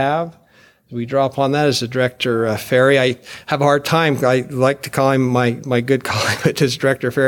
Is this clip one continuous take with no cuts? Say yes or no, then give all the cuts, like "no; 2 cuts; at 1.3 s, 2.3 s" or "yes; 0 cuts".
yes; 0 cuts